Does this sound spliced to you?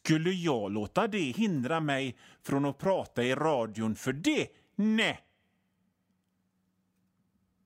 no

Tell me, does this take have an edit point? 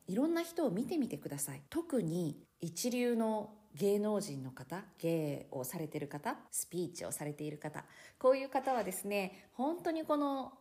yes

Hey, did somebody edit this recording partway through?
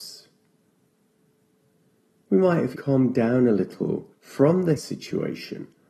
yes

